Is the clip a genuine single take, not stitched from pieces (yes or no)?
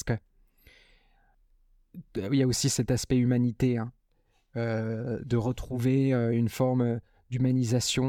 yes